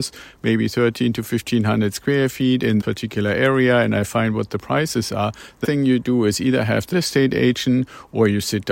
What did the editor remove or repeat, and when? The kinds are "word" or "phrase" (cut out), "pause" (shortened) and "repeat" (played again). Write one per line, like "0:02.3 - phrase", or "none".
0:02.8 - word
0:05.6 - word
0:06.9 - word